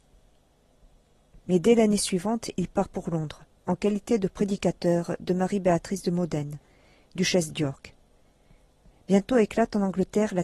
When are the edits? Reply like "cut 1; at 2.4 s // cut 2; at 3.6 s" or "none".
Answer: none